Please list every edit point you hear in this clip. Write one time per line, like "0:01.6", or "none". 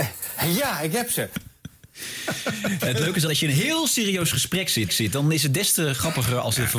0:03.3
0:04.9